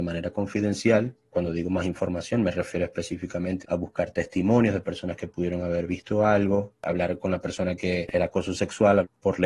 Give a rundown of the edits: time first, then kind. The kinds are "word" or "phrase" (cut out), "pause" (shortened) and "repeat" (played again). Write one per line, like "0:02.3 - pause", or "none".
0:08.1 - word